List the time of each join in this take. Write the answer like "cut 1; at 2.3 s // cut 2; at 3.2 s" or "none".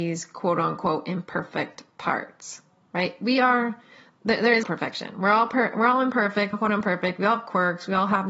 cut 1; at 4.6 s // cut 2; at 6.5 s